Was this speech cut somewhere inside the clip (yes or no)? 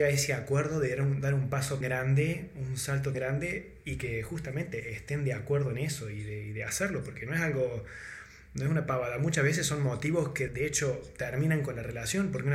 yes